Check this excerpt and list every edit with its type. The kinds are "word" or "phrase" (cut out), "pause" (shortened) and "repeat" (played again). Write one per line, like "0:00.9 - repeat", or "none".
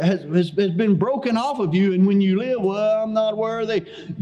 none